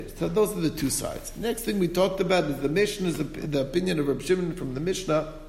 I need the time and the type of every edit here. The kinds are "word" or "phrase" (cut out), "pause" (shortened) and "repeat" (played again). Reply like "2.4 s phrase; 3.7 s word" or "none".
none